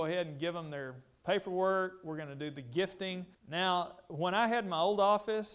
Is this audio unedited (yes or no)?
no